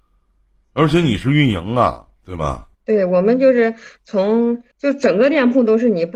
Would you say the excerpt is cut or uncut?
cut